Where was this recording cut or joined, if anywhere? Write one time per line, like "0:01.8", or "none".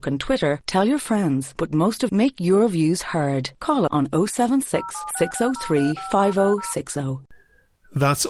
0:02.1
0:03.9